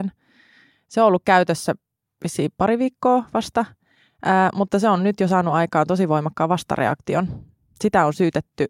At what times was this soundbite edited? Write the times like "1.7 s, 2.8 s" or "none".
none

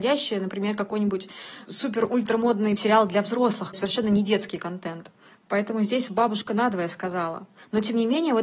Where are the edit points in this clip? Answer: 2.8 s, 3.7 s, 6.1 s

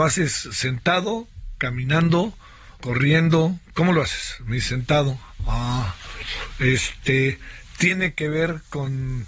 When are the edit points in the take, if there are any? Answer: 2.7 s

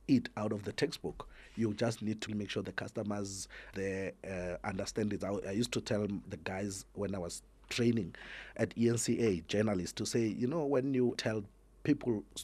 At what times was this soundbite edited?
2.3 s, 2.6 s, 3.7 s, 6.2 s, 8.5 s, 11.1 s

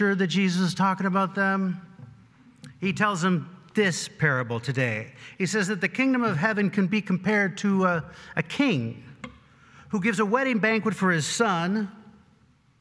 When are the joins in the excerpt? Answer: none

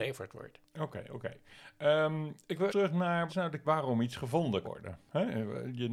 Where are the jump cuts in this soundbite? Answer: 2.7 s, 3.3 s, 3.6 s, 4.6 s

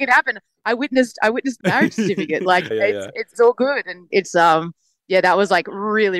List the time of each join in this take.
1.6 s, 2.7 s, 3.3 s, 4.1 s

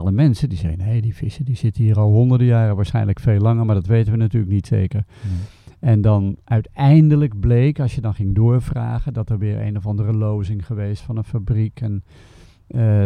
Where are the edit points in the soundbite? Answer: 11.0 s

